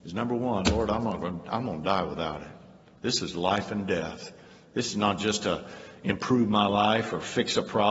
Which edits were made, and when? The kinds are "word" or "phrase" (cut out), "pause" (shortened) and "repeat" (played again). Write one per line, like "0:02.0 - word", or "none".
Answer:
none